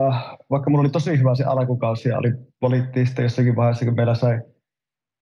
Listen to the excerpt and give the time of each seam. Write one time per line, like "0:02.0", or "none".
none